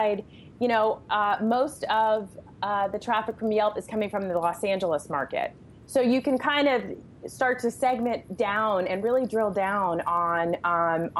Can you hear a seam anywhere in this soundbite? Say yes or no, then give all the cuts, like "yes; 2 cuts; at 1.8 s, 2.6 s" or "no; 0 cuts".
no; 0 cuts